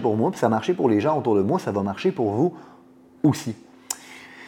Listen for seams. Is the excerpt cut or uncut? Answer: uncut